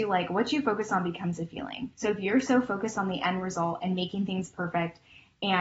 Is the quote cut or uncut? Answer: cut